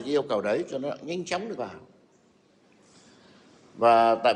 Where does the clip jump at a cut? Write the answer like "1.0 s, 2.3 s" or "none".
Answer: 1.6 s